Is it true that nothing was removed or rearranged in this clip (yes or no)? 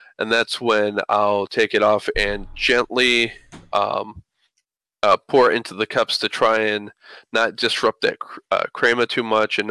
yes